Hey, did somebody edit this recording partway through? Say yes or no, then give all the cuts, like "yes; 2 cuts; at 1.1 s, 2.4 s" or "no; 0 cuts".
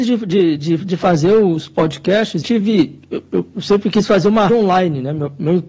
yes; 2 cuts; at 2.4 s, 4.5 s